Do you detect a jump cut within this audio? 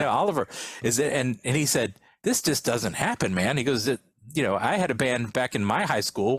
no; 0 cuts

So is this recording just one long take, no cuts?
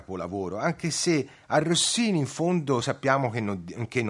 yes; 0 cuts

